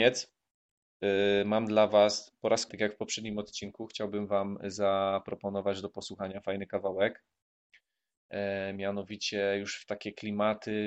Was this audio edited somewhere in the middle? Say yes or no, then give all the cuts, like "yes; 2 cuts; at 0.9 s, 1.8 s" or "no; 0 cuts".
yes; 1 cut; at 2.7 s